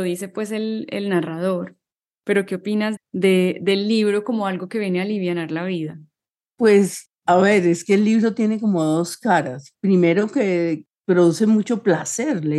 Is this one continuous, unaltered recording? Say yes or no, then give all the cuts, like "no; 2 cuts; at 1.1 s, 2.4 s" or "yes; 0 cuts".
no; 1 cut; at 3.0 s